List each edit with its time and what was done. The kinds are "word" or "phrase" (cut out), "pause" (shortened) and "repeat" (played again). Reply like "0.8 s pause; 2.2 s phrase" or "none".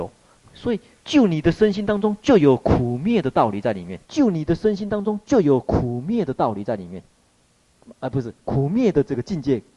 4.0 s pause